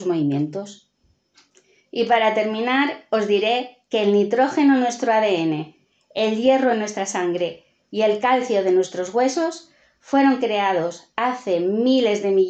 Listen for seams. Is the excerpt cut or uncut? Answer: uncut